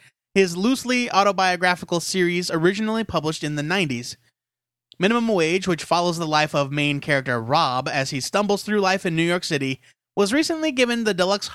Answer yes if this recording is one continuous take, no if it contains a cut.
yes